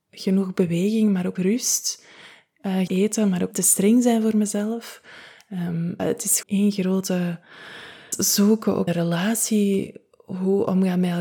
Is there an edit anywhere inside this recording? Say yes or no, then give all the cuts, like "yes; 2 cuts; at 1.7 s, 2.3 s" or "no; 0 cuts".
yes; 7 cuts; at 1.4 s, 2.9 s, 3.5 s, 6.0 s, 6.4 s, 8.1 s, 8.9 s